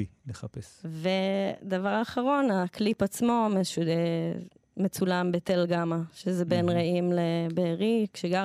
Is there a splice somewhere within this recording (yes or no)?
no